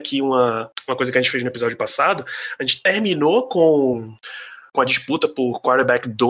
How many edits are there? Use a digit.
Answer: 0